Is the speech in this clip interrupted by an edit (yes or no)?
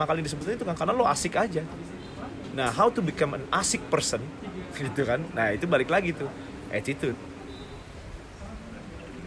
no